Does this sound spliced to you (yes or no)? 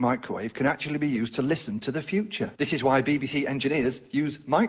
yes